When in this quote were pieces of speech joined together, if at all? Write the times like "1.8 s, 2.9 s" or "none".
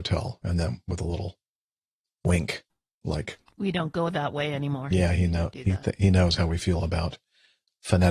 none